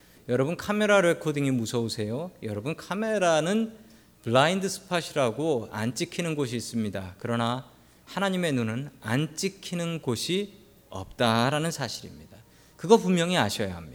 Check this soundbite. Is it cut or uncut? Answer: uncut